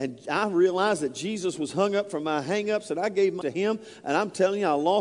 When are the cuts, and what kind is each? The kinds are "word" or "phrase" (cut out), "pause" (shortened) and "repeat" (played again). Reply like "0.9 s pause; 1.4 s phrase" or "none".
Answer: 3.4 s word